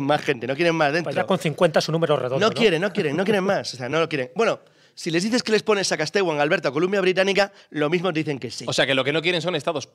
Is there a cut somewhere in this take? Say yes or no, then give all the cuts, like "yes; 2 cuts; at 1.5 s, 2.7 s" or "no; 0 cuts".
no; 0 cuts